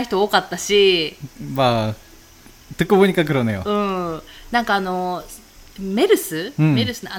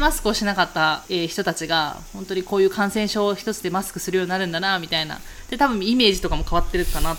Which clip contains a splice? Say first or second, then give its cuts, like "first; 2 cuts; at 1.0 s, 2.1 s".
second; 1 cut; at 1.0 s